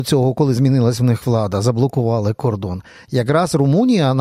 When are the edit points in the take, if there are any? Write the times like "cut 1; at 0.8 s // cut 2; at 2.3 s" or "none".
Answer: none

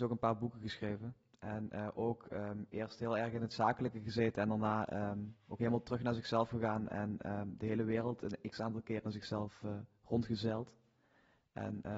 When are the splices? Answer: none

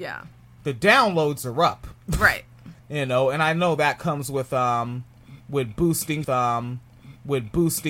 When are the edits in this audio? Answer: cut 1; at 2.8 s // cut 2; at 6.2 s

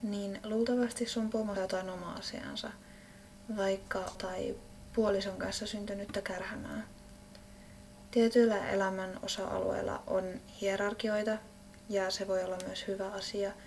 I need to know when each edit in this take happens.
cut 1; at 1.6 s // cut 2; at 4.1 s

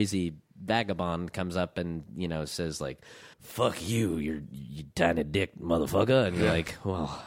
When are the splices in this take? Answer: cut 1; at 3.3 s

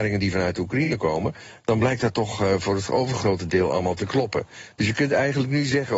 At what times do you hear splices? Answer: none

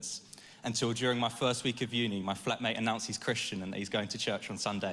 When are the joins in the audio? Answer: none

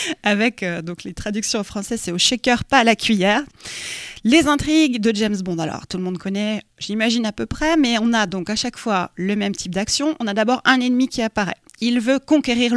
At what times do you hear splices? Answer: none

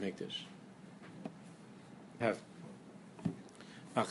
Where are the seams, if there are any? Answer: cut 1; at 2.2 s

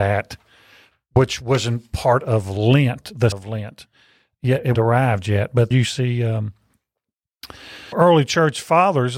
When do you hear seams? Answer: cut 1; at 3.3 s // cut 2; at 4.7 s // cut 3; at 5.7 s // cut 4; at 7.9 s

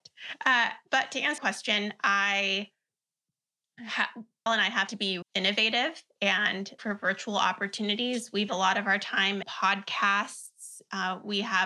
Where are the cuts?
cut 1; at 1.4 s // cut 2; at 4.5 s // cut 3; at 4.9 s // cut 4; at 5.2 s // cut 5; at 6.8 s // cut 6; at 8.5 s // cut 7; at 9.4 s

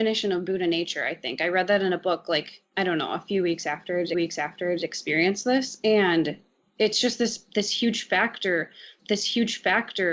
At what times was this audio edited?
cut 1; at 4.1 s // cut 2; at 9.0 s

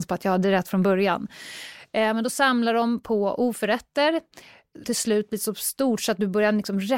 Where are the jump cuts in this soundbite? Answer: cut 1; at 4.8 s

